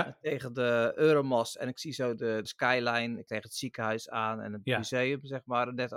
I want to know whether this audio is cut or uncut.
cut